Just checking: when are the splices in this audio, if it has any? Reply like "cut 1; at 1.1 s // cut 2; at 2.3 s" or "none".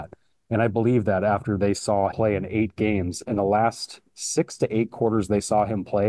cut 1; at 2.1 s